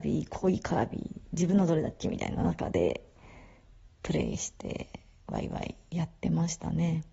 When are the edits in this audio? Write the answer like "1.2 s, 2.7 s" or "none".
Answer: none